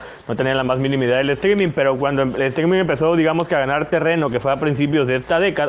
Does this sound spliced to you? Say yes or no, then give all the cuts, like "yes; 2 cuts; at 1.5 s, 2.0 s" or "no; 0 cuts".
no; 0 cuts